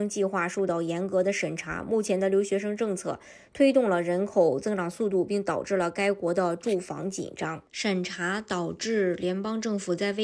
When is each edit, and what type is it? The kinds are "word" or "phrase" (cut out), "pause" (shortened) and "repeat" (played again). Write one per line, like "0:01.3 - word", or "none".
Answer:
0:07.7 - pause